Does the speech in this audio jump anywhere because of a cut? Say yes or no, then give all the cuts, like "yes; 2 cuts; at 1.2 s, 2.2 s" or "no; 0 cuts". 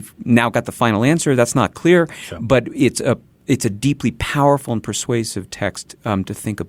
no; 0 cuts